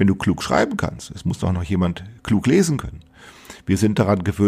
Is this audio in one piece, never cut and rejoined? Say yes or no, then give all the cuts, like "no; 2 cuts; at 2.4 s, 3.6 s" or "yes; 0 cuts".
yes; 0 cuts